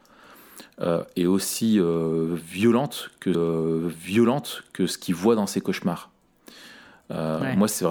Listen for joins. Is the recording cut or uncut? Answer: cut